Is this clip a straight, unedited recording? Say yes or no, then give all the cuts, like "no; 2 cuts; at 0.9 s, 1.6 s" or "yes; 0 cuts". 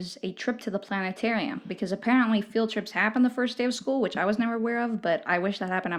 yes; 0 cuts